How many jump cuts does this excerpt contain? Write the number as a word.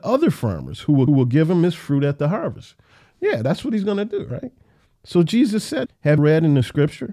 three